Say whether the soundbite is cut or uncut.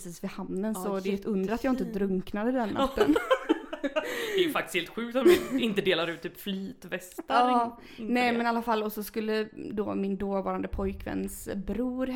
uncut